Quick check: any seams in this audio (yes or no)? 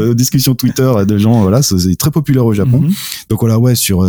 no